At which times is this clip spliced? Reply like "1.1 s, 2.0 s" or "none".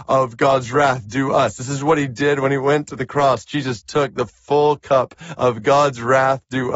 none